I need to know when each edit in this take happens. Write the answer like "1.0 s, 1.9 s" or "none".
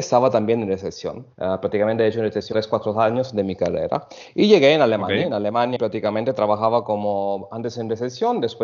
1.3 s, 2.5 s, 5.8 s